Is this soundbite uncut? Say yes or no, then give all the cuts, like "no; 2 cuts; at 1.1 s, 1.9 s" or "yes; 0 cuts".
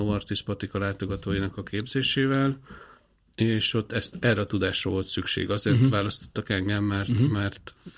yes; 0 cuts